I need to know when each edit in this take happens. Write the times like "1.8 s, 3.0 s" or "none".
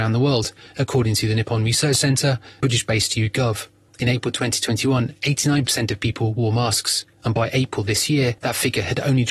2.6 s, 3.9 s, 7.1 s, 8.4 s